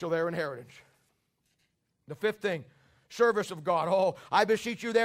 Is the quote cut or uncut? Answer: uncut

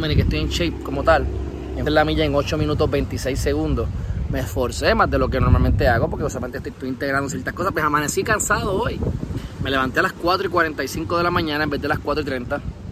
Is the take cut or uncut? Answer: cut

